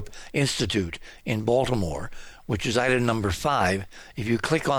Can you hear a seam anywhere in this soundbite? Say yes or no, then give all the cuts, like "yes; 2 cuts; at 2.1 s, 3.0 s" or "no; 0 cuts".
no; 0 cuts